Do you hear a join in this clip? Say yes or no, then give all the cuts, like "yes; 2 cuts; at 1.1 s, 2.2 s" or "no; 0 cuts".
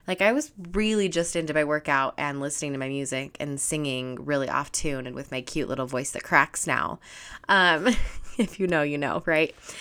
no; 0 cuts